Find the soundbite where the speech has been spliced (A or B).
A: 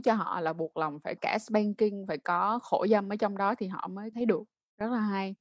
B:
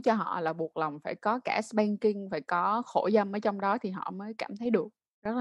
A